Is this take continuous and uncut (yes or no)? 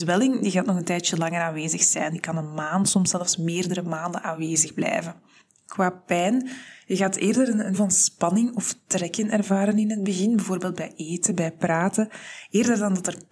no